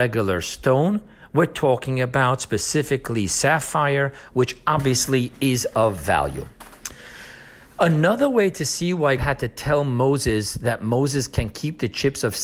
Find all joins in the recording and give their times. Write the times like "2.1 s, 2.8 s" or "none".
9.2 s